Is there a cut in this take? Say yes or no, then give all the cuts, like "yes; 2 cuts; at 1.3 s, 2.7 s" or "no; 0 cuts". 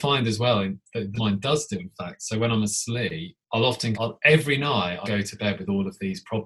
yes; 5 cuts; at 1.2 s, 1.8 s, 3.4 s, 3.9 s, 5.0 s